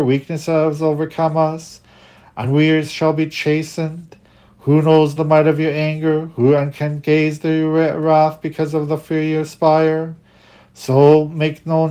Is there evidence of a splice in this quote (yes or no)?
no